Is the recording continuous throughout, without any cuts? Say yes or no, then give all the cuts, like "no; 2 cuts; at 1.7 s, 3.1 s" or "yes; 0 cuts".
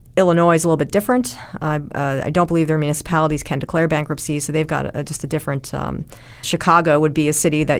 no; 1 cut; at 6.4 s